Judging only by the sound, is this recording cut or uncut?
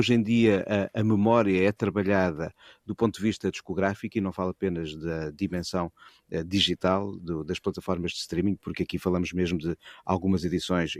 uncut